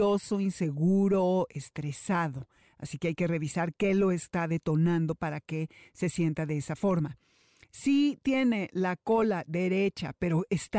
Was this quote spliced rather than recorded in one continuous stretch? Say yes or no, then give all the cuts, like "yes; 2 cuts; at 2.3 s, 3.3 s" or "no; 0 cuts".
no; 0 cuts